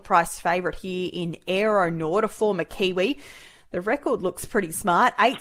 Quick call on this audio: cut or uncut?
uncut